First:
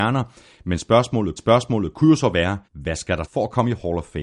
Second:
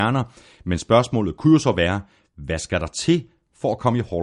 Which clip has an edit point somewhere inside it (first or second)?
first